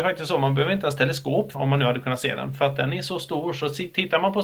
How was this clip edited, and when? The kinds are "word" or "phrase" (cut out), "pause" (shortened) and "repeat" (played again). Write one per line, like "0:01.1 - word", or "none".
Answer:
0:01.5 - phrase